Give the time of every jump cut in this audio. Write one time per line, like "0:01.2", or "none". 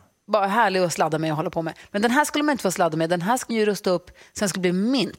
0:03.5